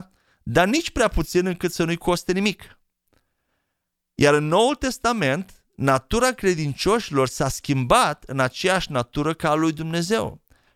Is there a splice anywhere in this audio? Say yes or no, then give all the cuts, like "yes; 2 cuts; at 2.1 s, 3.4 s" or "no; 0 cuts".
no; 0 cuts